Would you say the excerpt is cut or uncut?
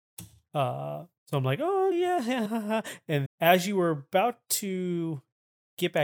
cut